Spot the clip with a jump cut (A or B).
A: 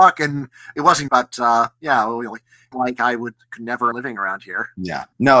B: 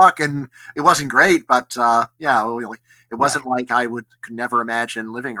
A